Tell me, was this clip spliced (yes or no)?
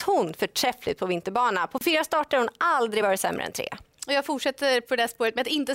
no